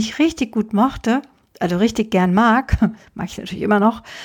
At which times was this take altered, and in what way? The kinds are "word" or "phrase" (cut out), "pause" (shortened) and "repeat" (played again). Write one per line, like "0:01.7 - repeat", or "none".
none